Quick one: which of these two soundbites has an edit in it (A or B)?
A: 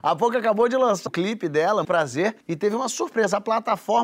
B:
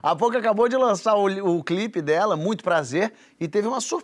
A